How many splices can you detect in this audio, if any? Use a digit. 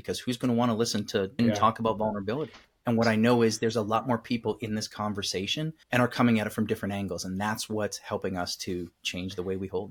3